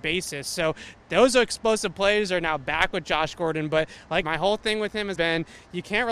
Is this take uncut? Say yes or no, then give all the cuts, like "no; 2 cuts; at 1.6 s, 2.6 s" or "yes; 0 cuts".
no; 2 cuts; at 4.2 s, 5.2 s